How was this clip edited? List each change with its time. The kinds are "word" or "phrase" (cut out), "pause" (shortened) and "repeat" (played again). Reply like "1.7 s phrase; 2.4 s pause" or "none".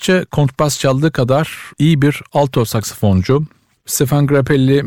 1.7 s pause